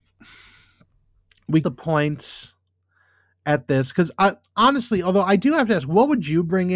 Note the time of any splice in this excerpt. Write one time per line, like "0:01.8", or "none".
0:01.6

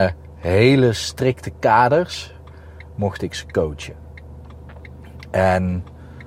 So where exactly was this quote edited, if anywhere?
none

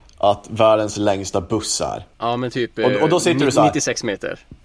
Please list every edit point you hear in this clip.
0:02.1

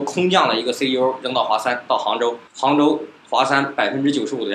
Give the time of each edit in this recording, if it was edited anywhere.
0:02.5

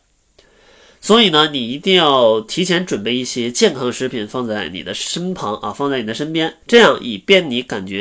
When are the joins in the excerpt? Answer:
0:06.6

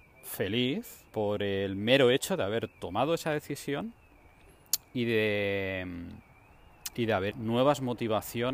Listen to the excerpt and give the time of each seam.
0:01.1
0:02.7
0:07.3

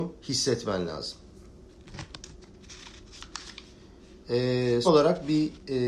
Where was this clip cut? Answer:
0:04.8

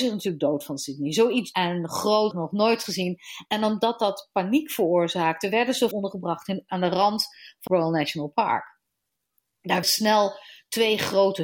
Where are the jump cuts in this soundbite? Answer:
0:01.5
0:02.3
0:05.9
0:06.7
0:07.7
0:09.8

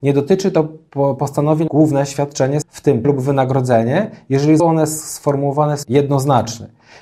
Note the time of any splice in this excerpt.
0:01.7
0:02.6
0:03.0
0:04.6
0:05.8

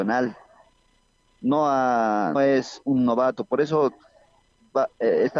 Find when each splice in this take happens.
0:02.3
0:02.8

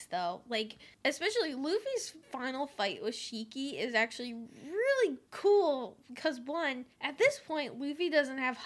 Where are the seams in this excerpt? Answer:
0:00.9
0:05.3
0:06.9

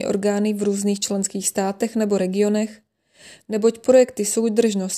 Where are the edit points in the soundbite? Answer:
none

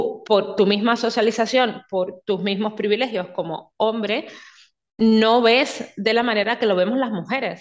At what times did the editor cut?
none

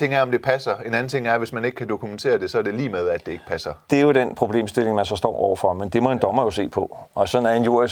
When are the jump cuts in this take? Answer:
none

